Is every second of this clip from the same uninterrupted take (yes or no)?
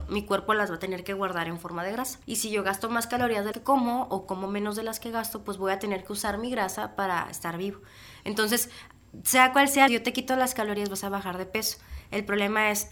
no